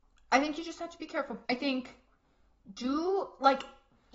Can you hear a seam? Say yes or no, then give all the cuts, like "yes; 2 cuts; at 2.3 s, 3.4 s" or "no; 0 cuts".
yes; 1 cut; at 1.4 s